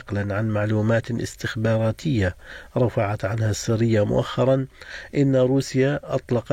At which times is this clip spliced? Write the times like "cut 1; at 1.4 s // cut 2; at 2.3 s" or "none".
none